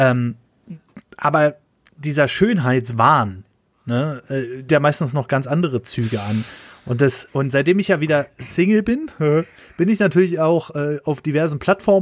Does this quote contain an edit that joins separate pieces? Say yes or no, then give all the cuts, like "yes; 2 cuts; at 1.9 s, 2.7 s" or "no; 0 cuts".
yes; 2 cuts; at 4.7 s, 7.3 s